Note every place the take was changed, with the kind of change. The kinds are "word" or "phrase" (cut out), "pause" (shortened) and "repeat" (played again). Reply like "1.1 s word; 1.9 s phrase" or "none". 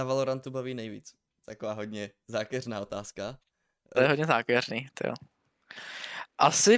none